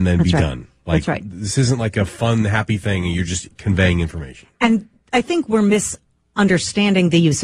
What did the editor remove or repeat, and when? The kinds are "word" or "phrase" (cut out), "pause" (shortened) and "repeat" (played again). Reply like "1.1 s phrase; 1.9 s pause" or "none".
none